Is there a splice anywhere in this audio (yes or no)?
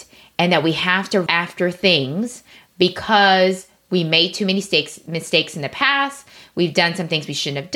yes